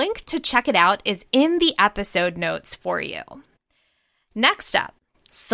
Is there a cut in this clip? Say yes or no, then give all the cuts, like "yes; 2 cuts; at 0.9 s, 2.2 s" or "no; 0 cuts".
no; 0 cuts